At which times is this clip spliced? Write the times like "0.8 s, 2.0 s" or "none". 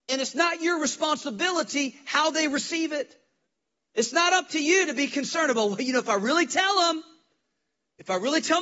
3.5 s